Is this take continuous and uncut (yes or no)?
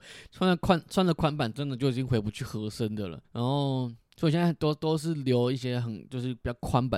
no